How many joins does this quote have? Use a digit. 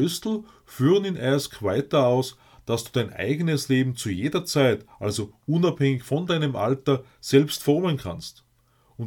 0